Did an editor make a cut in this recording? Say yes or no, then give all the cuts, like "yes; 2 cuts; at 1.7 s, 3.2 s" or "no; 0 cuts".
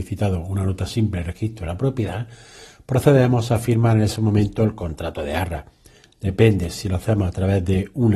no; 0 cuts